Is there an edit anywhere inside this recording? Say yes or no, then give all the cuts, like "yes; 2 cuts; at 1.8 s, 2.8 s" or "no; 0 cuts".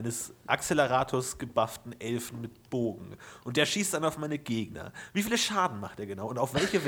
no; 0 cuts